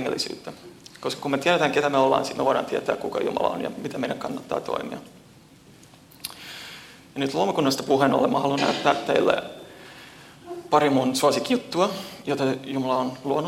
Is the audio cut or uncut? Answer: uncut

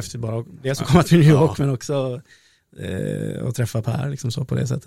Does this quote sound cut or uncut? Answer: uncut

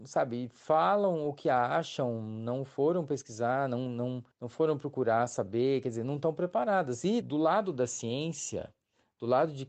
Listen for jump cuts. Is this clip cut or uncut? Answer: cut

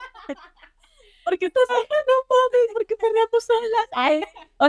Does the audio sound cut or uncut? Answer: cut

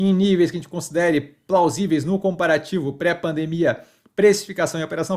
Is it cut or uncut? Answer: uncut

